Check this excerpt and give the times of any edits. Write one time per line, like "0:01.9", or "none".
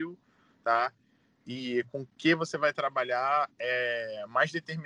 none